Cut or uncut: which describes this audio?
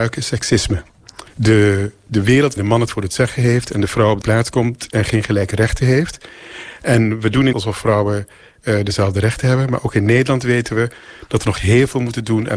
cut